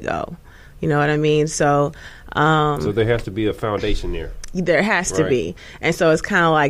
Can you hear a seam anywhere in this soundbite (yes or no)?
no